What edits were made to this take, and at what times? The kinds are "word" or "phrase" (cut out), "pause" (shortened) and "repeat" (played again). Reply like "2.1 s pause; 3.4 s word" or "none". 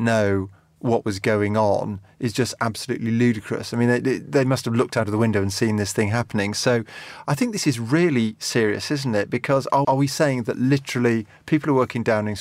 9.8 s word